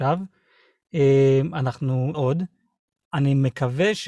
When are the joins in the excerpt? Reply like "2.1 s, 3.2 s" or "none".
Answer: 2.1 s